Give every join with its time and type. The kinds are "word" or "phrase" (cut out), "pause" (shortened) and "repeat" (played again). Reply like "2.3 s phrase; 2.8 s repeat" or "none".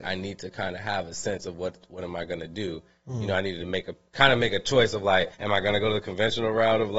5.3 s pause